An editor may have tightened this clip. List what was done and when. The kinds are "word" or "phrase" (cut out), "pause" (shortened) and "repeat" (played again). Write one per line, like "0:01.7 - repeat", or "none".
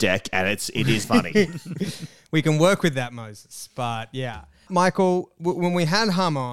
0:01.0 - word
0:04.7 - word